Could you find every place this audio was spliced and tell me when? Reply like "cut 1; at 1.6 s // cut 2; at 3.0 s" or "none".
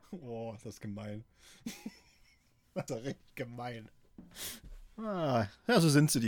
cut 1; at 2.9 s